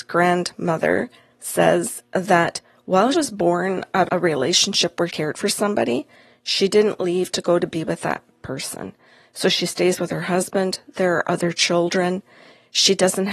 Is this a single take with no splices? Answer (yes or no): no